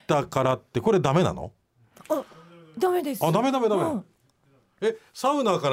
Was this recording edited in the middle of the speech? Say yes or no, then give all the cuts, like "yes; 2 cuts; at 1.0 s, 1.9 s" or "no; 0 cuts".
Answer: no; 0 cuts